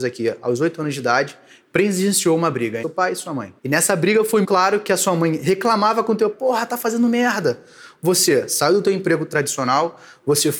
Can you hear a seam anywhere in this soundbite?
yes; 4 cuts; at 2.8 s, 3.6 s, 4.4 s, 6.3 s

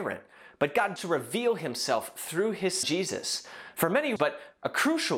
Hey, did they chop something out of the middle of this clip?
yes; 3 cuts; at 1.0 s, 2.8 s, 4.2 s

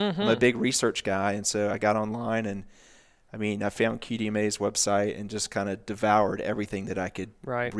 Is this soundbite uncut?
yes; 0 cuts

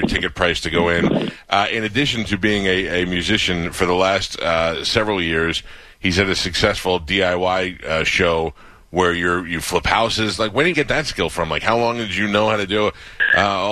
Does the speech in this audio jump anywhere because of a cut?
yes; 1 cut; at 10.7 s

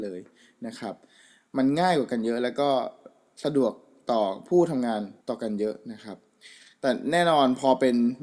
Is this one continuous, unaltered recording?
no; 1 cut; at 5.2 s

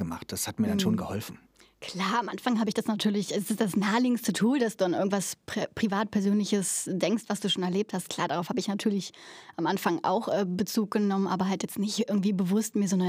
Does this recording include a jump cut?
no; 0 cuts

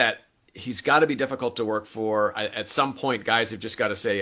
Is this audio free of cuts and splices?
yes; 0 cuts

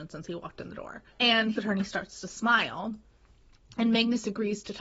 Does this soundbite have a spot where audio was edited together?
yes; 2 cuts; at 1.1 s, 1.6 s

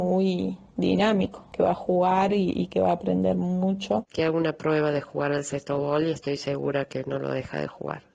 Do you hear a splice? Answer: no; 0 cuts

